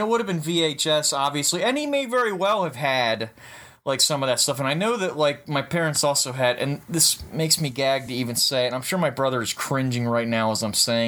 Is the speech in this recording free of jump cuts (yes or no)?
yes